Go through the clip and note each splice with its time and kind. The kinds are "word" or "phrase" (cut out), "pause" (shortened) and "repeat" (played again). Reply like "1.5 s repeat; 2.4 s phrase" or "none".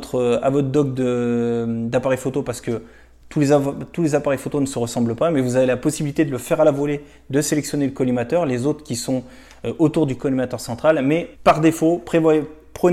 11.3 s pause